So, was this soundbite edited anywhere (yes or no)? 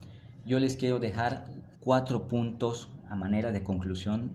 yes